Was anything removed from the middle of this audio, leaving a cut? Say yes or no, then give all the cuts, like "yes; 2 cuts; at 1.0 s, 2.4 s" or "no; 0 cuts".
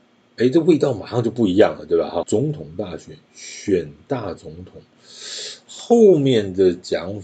yes; 1 cut; at 2.2 s